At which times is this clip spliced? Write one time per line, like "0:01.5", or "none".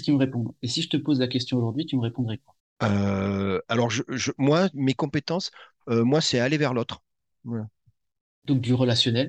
0:02.6